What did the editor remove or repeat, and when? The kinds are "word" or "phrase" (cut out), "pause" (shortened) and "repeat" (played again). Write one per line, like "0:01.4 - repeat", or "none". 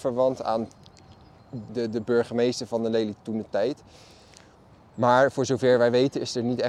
0:01.7 - word